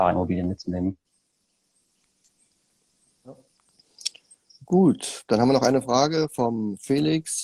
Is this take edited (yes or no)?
no